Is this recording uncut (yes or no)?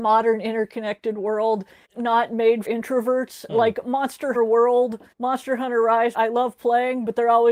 no